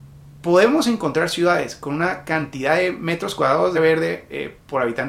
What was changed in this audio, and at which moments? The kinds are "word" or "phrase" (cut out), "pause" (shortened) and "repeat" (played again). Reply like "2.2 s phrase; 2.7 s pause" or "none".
3.7 s word